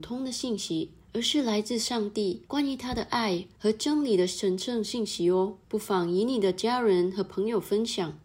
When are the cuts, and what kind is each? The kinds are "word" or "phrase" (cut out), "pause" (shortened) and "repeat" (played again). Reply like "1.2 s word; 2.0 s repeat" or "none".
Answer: 1.0 s pause; 2.5 s pause; 3.5 s pause; 5.6 s pause